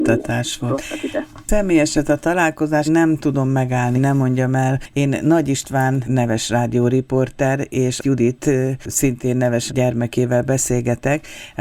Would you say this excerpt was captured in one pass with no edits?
no; 6 cuts; at 1.9 s, 2.8 s, 3.9 s, 6.0 s, 8.0 s, 9.7 s

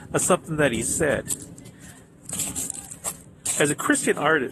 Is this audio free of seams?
yes; 0 cuts

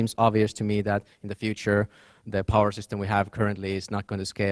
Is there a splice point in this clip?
no; 0 cuts

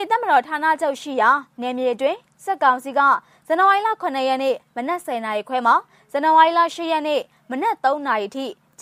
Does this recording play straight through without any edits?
yes; 0 cuts

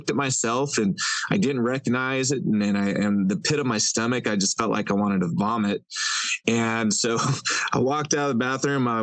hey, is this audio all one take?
yes; 0 cuts

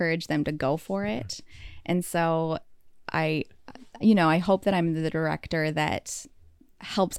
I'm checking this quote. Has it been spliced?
no; 0 cuts

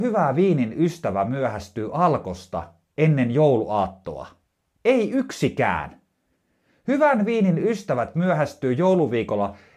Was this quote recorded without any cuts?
yes; 0 cuts

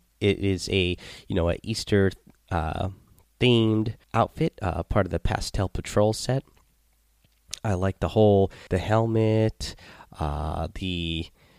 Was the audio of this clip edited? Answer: yes; 2 cuts; at 4.0 s, 8.7 s

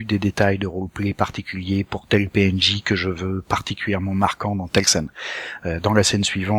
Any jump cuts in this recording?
no; 0 cuts

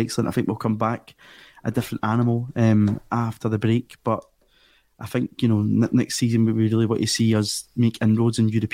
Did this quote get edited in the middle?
no; 0 cuts

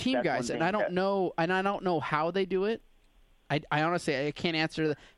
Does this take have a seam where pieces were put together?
no; 0 cuts

